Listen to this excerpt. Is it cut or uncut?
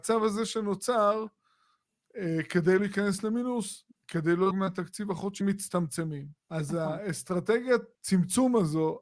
cut